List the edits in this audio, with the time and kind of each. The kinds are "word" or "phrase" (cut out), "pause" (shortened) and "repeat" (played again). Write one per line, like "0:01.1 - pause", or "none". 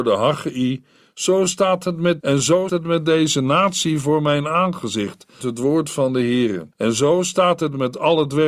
0:02.2 - phrase
0:02.7 - word
0:05.4 - word
0:06.7 - pause